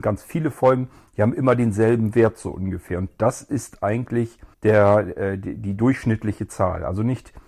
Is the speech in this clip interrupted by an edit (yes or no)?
yes